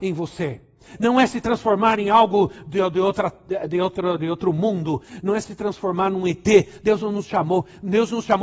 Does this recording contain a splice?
no; 0 cuts

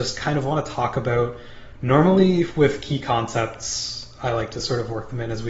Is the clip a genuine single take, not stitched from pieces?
yes; 0 cuts

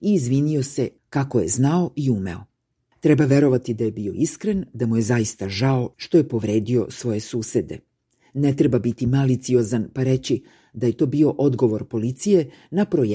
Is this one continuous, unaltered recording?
yes; 0 cuts

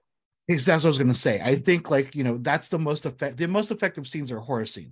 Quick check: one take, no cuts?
yes; 0 cuts

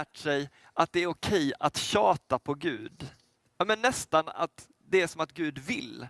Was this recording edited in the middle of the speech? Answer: yes; 1 cut; at 3.4 s

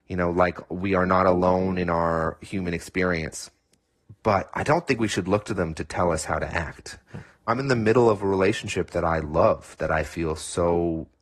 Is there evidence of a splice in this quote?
no; 0 cuts

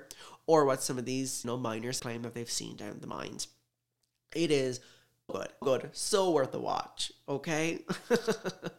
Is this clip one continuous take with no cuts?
no; 4 cuts; at 1.4 s, 2.0 s, 5.3 s, 5.6 s

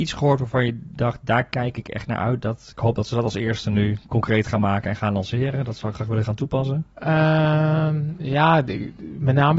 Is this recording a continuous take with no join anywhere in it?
no; 2 cuts; at 5.9 s, 6.9 s

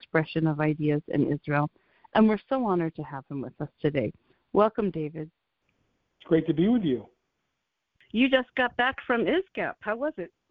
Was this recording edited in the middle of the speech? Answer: no; 0 cuts

